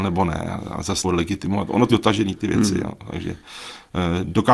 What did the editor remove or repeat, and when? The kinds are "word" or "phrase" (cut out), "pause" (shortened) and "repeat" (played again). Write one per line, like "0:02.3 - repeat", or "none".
0:01.0 - word
0:01.9 - word
0:02.4 - word